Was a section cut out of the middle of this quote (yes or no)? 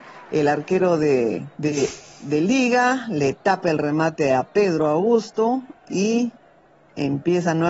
yes